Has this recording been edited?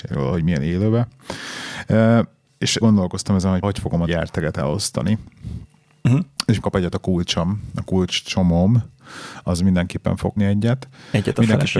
yes; 5 cuts; at 2.8 s, 3.6 s, 4.1 s, 6.6 s, 10.4 s

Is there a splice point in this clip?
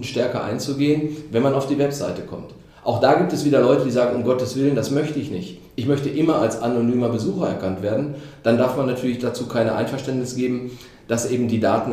no; 0 cuts

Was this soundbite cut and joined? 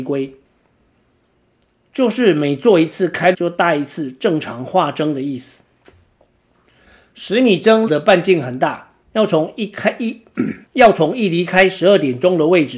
yes; 4 cuts; at 3.3 s, 7.9 s, 9.0 s, 10.7 s

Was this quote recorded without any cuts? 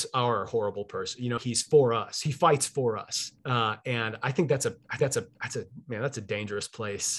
no; 3 cuts; at 1.4 s, 3.4 s, 5.0 s

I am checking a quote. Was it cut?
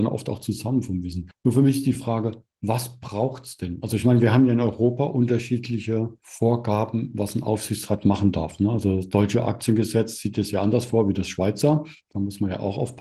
no; 0 cuts

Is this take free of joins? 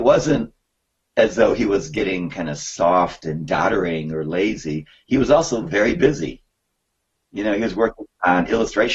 yes; 0 cuts

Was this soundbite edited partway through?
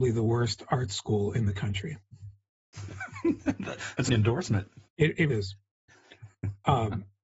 yes; 3 cuts; at 4.1 s, 4.9 s, 5.3 s

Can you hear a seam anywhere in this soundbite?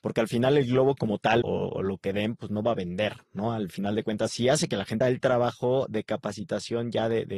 yes; 2 cuts; at 1.4 s, 5.0 s

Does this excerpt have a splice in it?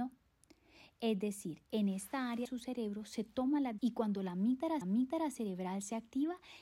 yes; 3 cuts; at 2.5 s, 3.8 s, 4.8 s

